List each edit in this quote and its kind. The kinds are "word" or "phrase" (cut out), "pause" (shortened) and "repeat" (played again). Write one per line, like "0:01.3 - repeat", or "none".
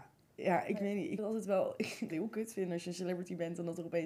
0:01.2 - word
0:02.1 - word